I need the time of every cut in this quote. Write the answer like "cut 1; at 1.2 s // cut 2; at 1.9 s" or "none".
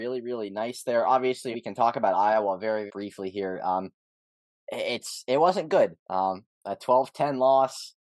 cut 1; at 1.5 s // cut 2; at 2.9 s // cut 3; at 6.0 s